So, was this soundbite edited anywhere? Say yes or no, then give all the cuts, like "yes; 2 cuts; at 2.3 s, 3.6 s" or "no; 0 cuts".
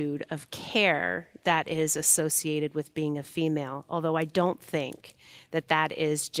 no; 0 cuts